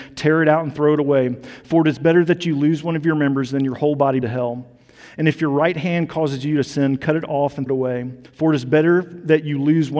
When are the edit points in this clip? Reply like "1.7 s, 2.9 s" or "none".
4.2 s, 7.7 s, 8.3 s